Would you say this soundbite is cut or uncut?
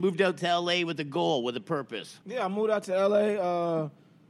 cut